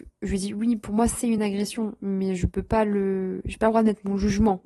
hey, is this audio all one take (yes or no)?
yes